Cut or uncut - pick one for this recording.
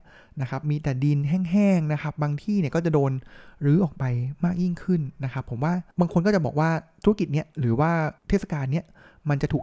cut